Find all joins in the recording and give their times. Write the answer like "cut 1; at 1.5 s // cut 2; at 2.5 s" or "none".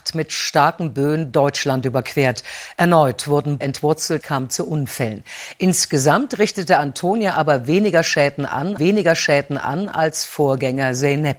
cut 1; at 3.6 s // cut 2; at 4.2 s // cut 3; at 8.8 s